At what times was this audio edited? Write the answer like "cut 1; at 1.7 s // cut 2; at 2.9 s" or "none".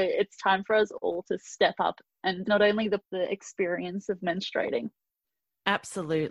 cut 1; at 2.4 s // cut 2; at 3.0 s